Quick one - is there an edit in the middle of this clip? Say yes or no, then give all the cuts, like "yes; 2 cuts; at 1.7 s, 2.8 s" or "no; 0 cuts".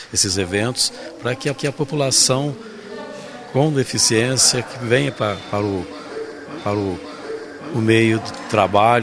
yes; 2 cuts; at 1.6 s, 6.6 s